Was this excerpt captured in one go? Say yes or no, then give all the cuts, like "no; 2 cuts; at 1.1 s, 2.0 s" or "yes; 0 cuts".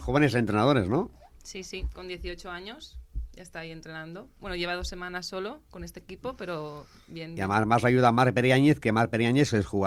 yes; 0 cuts